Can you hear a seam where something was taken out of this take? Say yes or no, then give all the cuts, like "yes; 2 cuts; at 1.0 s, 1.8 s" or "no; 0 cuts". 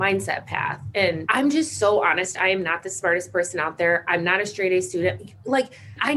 no; 0 cuts